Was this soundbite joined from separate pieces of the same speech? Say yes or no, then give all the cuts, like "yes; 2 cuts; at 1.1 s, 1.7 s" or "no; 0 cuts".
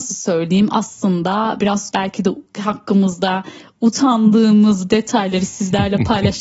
yes; 3 cuts; at 1.6 s, 1.9 s, 4.9 s